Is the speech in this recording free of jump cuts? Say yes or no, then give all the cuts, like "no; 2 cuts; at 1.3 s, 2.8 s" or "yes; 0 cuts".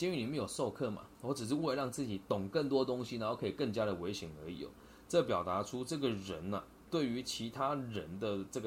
yes; 0 cuts